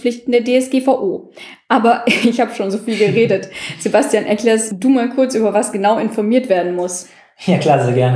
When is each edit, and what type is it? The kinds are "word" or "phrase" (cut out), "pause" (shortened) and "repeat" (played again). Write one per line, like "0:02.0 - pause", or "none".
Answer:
none